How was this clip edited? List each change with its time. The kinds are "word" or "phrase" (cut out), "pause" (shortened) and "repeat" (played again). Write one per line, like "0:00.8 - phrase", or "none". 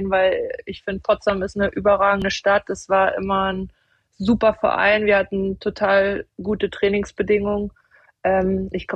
none